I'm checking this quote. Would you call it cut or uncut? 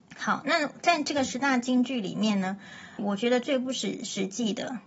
cut